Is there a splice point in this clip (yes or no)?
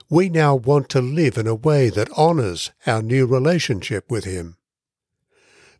no